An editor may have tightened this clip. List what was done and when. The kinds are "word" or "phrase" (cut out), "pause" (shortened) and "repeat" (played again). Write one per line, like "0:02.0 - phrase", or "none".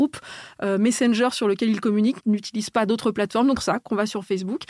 0:02.2 - phrase
0:03.6 - phrase